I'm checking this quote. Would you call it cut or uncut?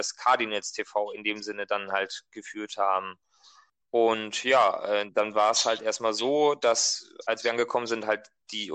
uncut